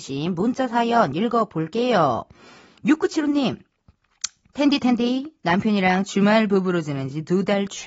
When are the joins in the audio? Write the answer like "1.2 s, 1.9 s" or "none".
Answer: none